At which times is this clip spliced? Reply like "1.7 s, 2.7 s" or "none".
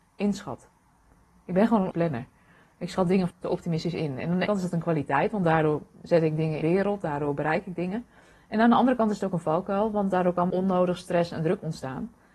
1.9 s, 3.3 s, 4.5 s, 6.6 s, 10.5 s